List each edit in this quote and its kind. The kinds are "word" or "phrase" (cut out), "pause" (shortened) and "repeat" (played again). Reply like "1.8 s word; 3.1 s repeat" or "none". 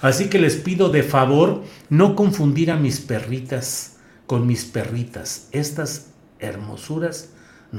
none